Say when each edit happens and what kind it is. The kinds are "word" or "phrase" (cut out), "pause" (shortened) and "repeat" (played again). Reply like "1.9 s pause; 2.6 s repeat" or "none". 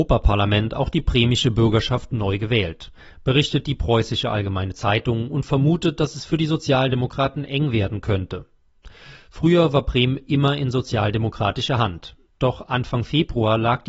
none